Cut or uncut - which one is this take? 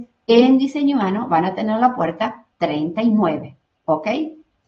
cut